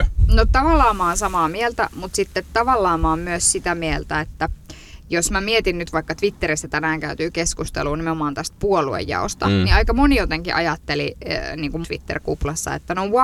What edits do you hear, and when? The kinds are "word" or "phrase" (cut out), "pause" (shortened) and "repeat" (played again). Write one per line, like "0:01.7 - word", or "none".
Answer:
0:11.8 - word